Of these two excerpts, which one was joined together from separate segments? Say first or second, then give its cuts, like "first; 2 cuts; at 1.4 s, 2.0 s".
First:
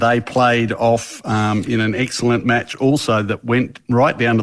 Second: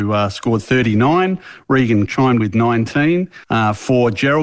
second; 3 cuts; at 2.1 s, 2.4 s, 3.4 s